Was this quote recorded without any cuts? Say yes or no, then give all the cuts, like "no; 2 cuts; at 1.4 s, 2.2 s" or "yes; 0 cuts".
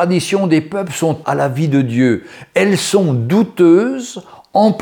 no; 1 cut; at 1.2 s